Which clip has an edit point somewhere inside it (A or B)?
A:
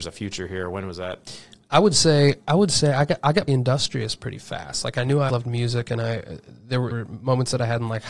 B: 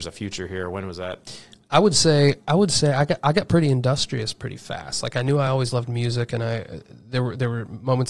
A